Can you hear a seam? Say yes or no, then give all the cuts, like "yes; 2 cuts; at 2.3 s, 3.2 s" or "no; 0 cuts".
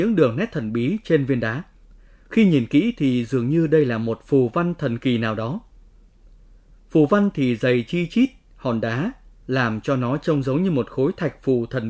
no; 0 cuts